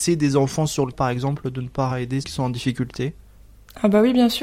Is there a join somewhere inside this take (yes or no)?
yes